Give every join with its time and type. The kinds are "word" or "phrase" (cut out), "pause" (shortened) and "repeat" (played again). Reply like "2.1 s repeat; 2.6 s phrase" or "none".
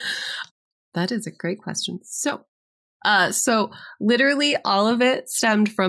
none